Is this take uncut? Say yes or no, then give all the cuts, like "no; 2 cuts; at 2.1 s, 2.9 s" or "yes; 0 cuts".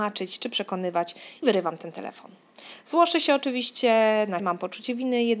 no; 2 cuts; at 1.4 s, 4.4 s